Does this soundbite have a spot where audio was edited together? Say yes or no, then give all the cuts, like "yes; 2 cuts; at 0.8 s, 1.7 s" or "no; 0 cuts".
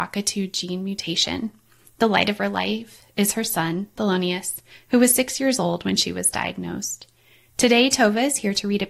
no; 0 cuts